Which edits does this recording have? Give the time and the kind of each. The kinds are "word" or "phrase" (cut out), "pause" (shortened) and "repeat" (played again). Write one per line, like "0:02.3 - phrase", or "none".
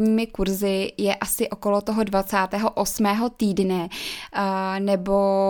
none